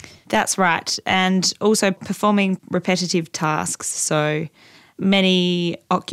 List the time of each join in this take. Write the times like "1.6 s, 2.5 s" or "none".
none